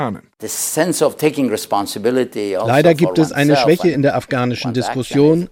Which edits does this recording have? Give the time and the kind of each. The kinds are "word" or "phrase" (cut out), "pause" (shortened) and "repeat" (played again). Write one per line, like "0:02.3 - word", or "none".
none